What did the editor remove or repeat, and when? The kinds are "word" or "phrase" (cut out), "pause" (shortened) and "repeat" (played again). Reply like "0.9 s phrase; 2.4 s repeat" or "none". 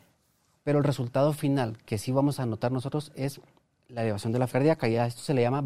4.5 s word

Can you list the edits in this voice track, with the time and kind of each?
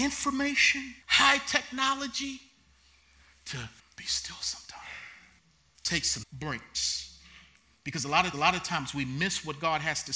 1.0 s pause; 3.8 s pause; 5.4 s pause; 6.2 s word; 8.3 s repeat

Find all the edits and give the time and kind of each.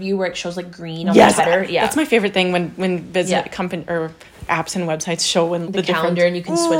1.4 s phrase; 4.5 s word; 5.6 s word

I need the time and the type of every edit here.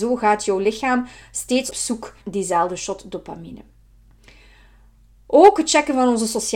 1.7 s phrase; 2.2 s word

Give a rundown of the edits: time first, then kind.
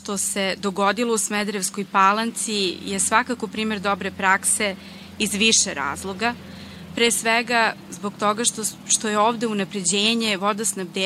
none

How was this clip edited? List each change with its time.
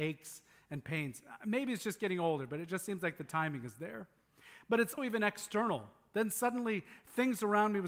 5.0 s word

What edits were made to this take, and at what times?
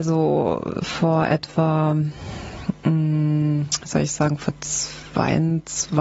none

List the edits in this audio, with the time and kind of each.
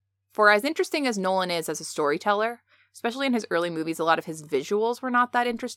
none

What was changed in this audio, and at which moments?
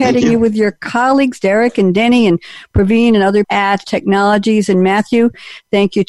3.4 s word; 3.8 s word

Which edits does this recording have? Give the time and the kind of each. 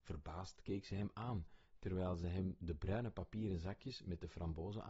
none

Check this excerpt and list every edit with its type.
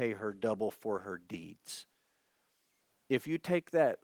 none

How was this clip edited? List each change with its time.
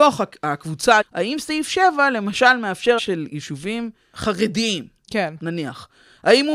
1.0 s word; 3.0 s word; 4.1 s word

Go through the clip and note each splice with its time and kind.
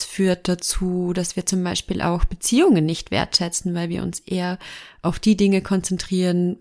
none

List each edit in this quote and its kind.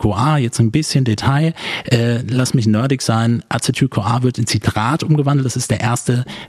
none

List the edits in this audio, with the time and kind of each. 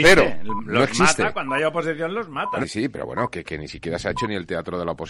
2.6 s word

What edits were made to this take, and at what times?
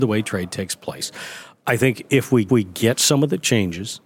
2.5 s repeat

